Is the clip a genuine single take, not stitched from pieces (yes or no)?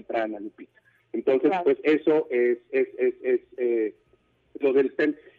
yes